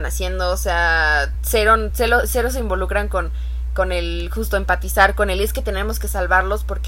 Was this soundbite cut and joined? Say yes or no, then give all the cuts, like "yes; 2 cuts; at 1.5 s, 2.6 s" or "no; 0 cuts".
no; 0 cuts